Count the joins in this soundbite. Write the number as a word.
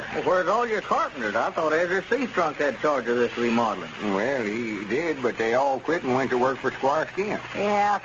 zero